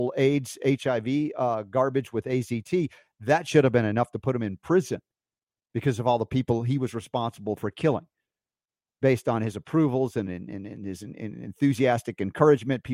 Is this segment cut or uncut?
uncut